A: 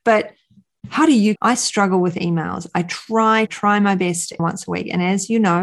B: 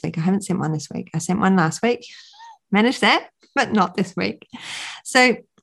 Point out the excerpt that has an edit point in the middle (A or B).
A